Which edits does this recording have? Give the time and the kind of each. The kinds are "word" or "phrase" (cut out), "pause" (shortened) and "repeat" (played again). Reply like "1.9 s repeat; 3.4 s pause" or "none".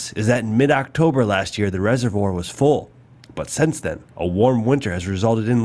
none

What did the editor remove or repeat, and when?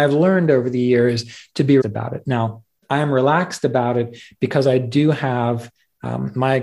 1.8 s word; 2.8 s pause

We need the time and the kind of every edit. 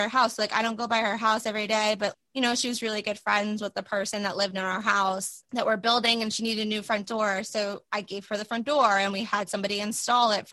none

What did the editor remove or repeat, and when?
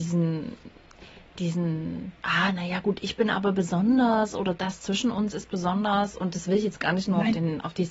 2.2 s pause

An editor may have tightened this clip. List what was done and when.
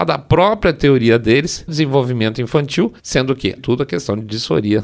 1.7 s word; 3.0 s pause; 3.6 s phrase

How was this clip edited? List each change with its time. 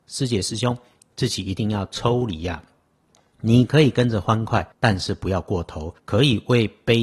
4.7 s pause; 6.0 s pause

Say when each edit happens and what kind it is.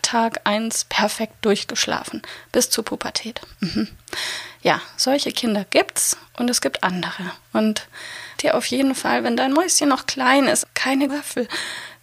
8.3 s word; 10.6 s word; 11.1 s word

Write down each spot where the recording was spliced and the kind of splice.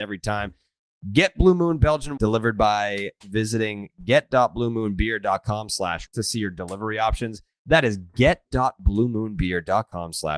2.2 s word; 6.1 s word

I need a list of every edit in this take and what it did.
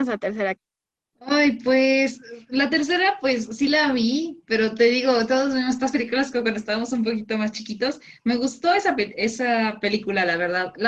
none

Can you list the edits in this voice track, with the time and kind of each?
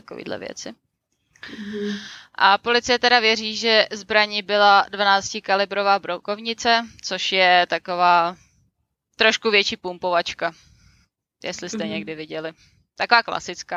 none

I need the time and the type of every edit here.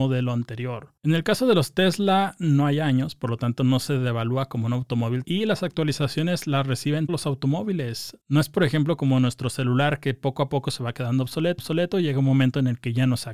1.0 s pause; 5.2 s word; 7.1 s word; 8.2 s pause; 11.6 s repeat

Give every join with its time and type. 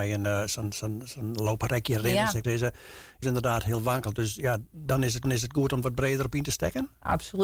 2.4 s word; 3.2 s phrase; 5.2 s repeat; 5.8 s word

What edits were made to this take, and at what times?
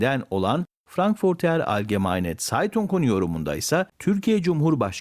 3.9 s pause

